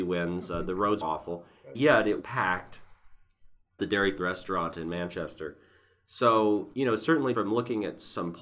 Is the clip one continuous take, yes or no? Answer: no